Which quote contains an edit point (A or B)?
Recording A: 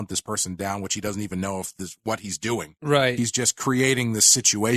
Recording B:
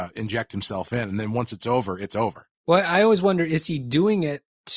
B